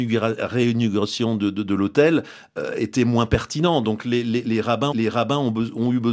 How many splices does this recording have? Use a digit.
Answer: 1